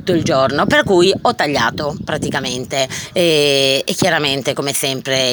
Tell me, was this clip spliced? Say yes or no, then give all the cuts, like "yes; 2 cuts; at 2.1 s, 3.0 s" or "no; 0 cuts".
no; 0 cuts